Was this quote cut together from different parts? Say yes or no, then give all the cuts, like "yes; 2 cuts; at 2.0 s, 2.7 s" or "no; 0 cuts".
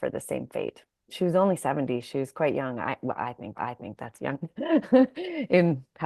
yes; 1 cut; at 3.6 s